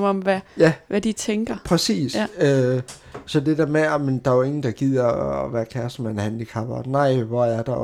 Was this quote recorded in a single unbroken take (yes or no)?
yes